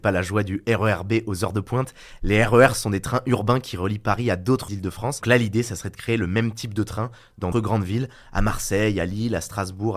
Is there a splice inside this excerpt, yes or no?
yes